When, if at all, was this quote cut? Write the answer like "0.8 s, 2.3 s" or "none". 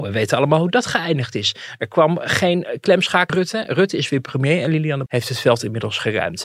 3.3 s, 5.1 s